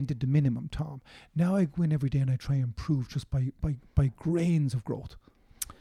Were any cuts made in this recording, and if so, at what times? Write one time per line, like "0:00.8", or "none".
none

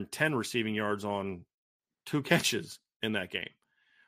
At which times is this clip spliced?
none

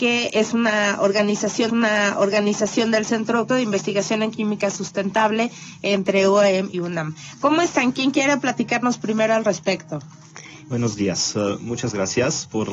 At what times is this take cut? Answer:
0:01.7
0:03.5
0:06.7
0:10.6

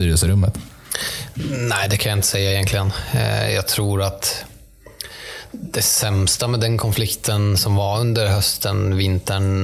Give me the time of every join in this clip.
none

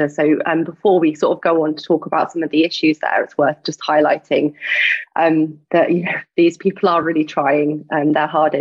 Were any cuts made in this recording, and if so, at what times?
none

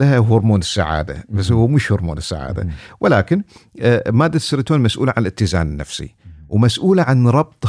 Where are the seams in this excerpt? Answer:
none

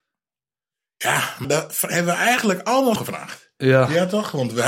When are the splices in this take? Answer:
0:01.4
0:03.0

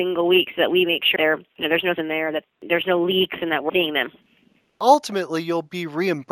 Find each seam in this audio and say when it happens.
0:01.2
0:02.0
0:03.7

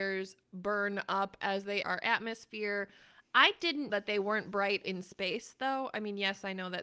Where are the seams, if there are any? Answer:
0:01.8
0:03.9
0:04.8

